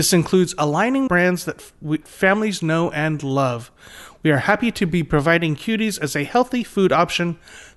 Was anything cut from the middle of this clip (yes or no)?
yes